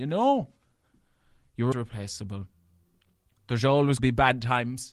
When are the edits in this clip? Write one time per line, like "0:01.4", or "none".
0:01.7
0:04.0